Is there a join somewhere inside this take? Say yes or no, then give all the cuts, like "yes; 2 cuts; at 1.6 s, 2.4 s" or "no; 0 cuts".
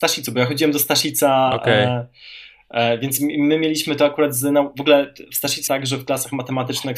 yes; 1 cut; at 5.7 s